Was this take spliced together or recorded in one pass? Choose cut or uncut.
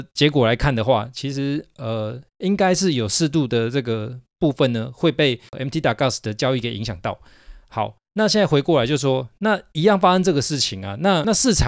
uncut